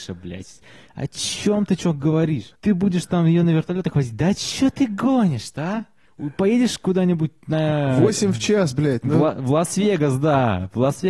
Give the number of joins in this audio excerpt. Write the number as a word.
two